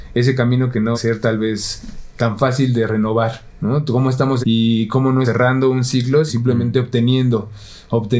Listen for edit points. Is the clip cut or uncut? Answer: cut